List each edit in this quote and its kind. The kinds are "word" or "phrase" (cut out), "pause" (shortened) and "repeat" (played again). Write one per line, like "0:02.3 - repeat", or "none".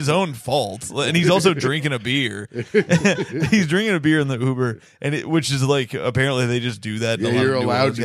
none